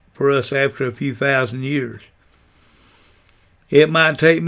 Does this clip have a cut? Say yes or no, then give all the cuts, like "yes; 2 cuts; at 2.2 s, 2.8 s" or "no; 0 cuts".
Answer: no; 0 cuts